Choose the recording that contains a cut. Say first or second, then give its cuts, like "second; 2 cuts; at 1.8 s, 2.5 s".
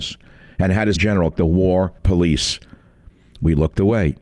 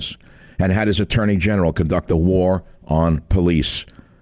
first; 3 cuts; at 1.0 s, 1.3 s, 2.0 s